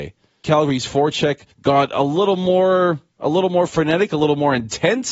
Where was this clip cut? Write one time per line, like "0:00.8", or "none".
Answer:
0:01.5